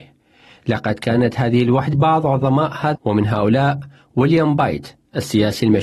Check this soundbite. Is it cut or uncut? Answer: cut